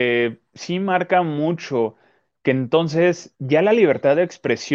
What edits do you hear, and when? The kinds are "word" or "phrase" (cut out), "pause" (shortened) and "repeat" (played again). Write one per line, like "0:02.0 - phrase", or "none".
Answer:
none